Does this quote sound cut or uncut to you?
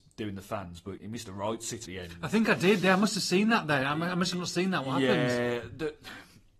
cut